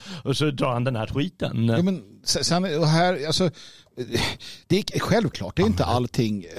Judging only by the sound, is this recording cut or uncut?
uncut